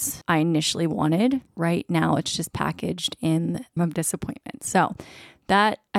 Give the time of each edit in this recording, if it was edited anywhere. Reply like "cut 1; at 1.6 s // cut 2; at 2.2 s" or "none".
cut 1; at 3.8 s